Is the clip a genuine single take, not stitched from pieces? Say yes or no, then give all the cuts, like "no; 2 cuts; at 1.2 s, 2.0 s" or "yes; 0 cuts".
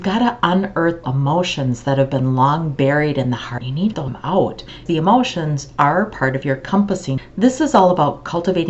no; 3 cuts; at 1.0 s, 3.9 s, 4.9 s